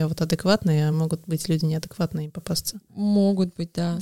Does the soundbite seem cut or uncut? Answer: uncut